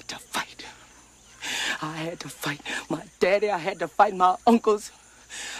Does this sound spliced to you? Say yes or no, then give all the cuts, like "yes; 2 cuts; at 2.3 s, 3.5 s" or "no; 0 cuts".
no; 0 cuts